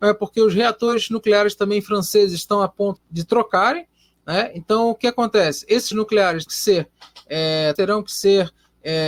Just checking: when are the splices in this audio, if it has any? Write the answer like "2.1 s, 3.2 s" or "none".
3.0 s, 5.9 s, 6.5 s, 7.8 s